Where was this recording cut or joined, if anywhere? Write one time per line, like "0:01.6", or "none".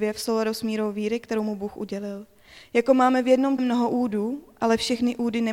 0:03.6